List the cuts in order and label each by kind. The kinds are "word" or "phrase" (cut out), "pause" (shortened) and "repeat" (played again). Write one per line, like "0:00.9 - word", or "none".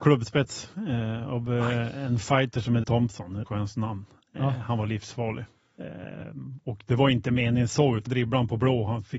0:02.8 - word
0:03.5 - word
0:08.1 - word